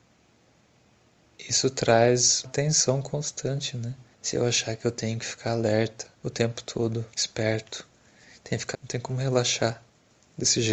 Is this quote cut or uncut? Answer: cut